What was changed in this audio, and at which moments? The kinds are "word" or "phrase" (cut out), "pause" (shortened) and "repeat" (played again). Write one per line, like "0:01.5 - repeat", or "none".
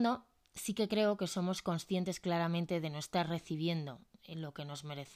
none